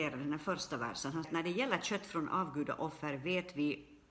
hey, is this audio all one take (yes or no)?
no